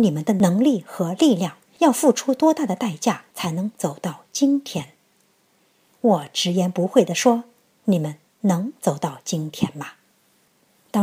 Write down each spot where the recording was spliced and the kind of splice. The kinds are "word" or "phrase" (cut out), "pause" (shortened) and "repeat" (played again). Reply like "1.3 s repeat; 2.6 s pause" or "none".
3.3 s pause